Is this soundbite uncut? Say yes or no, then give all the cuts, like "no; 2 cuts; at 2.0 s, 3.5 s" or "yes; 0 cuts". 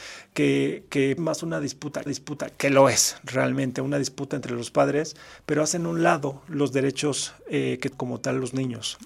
no; 3 cuts; at 1.2 s, 2.1 s, 7.9 s